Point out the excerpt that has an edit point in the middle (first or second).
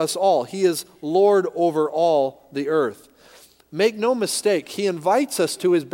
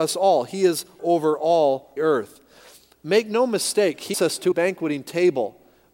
second